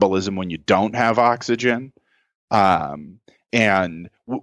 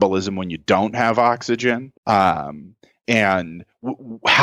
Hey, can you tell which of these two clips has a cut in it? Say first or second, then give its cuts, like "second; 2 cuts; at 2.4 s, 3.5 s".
second; 1 cut; at 2.0 s